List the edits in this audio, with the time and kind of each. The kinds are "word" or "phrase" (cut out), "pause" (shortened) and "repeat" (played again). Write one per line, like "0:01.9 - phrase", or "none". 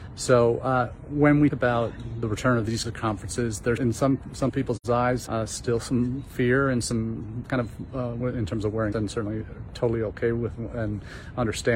0:01.5 - word
0:02.8 - word
0:03.8 - word
0:05.3 - word
0:07.4 - word
0:08.2 - word
0:08.9 - word